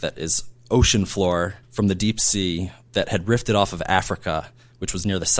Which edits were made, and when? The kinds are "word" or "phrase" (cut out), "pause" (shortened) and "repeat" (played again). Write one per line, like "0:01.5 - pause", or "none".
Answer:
0:01.6 - pause